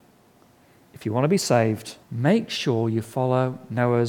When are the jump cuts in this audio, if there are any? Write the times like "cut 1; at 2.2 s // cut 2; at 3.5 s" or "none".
cut 1; at 2.0 s